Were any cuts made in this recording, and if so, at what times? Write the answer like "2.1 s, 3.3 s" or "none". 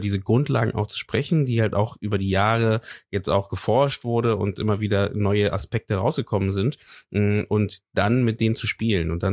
none